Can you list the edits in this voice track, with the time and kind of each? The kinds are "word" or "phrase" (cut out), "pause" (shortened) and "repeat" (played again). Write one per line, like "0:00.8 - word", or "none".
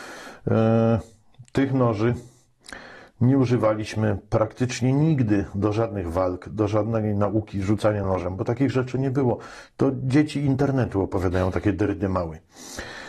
none